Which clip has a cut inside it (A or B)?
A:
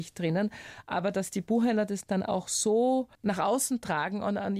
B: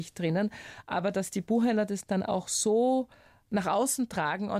A